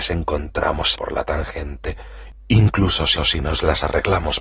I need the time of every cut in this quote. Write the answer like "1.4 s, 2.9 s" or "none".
1.0 s, 3.2 s